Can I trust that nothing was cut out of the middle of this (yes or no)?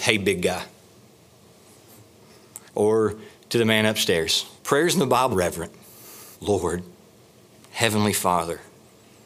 no